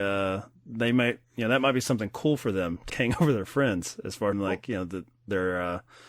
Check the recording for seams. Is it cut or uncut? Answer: cut